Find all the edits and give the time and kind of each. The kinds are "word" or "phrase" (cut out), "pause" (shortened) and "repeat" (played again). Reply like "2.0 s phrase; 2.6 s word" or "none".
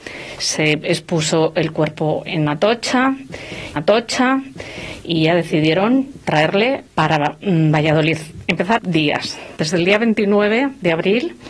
3.8 s repeat; 6.9 s pause; 8.8 s phrase